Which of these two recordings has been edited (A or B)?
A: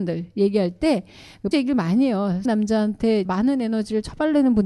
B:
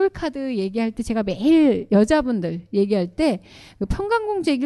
A